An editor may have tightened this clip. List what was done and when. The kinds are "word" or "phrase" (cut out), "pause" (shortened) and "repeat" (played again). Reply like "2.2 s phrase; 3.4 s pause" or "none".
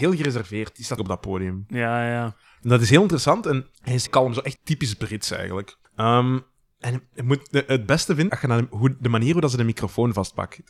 1.0 s phrase; 3.7 s pause; 4.1 s word; 4.6 s word; 5.8 s pause; 8.3 s word